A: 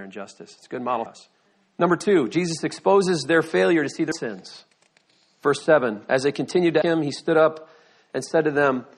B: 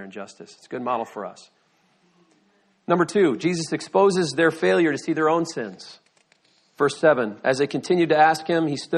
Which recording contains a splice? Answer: A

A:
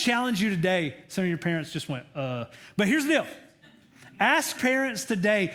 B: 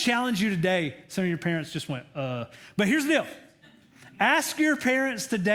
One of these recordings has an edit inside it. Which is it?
A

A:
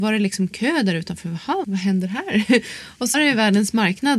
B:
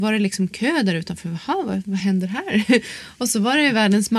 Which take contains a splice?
A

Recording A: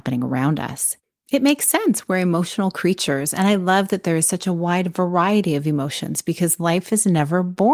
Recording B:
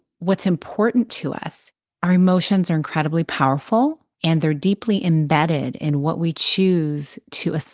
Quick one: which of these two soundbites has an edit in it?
B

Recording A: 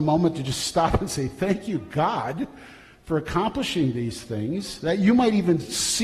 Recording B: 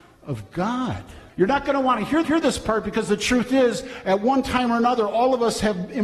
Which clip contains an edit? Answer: B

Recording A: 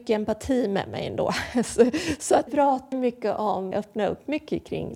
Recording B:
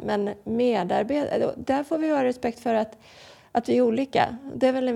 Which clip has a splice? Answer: A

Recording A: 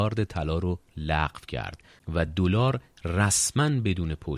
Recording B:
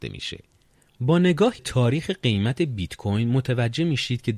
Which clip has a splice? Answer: B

